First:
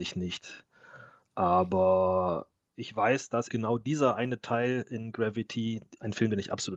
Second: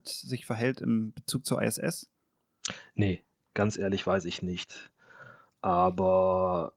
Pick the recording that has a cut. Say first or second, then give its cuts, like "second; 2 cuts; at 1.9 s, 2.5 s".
first; 2 cuts; at 2.7 s, 3.5 s